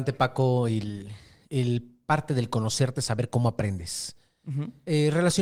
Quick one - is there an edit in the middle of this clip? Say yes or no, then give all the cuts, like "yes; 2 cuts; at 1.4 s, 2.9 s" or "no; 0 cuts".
no; 0 cuts